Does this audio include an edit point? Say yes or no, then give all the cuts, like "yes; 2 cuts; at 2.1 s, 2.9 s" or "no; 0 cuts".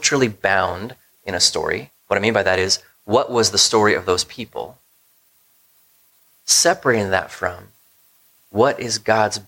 no; 0 cuts